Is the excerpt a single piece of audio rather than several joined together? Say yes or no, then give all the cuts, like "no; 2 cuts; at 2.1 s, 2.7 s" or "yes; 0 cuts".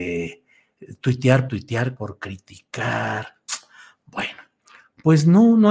no; 2 cuts; at 1.5 s, 2.0 s